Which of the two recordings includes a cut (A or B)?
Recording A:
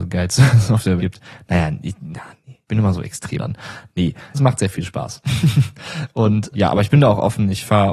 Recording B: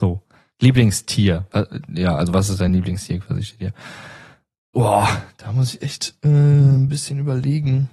A